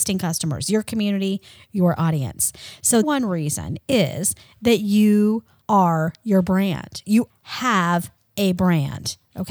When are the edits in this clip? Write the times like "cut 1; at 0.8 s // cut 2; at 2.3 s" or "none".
cut 1; at 3.0 s // cut 2; at 7.3 s